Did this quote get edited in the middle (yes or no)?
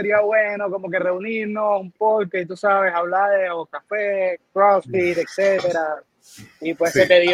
yes